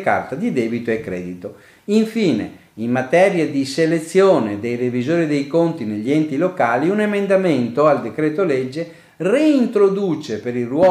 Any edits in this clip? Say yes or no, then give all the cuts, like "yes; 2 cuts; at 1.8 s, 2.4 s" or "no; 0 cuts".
no; 0 cuts